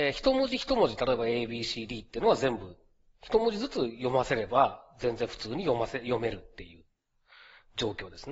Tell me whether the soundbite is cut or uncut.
uncut